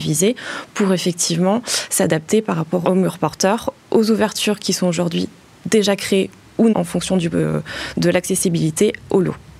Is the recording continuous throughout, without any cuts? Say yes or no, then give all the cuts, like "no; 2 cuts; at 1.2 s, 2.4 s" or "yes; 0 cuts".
no; 2 cuts; at 2.8 s, 6.7 s